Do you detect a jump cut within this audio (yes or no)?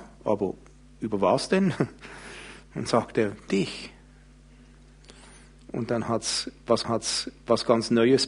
yes